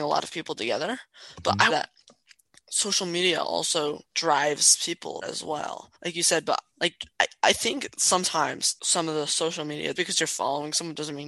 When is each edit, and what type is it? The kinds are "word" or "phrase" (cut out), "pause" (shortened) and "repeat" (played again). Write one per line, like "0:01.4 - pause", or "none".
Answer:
0:01.7 - phrase
0:04.1 - pause
0:05.2 - word
0:05.9 - pause
0:06.7 - word
0:07.1 - pause
0:08.8 - word
0:10.0 - word